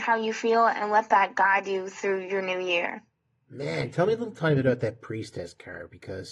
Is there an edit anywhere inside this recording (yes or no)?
no